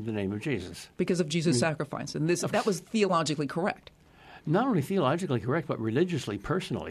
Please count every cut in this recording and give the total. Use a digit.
2